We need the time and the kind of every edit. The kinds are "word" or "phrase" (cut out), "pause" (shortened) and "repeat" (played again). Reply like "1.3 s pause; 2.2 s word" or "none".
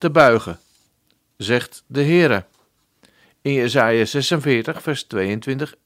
none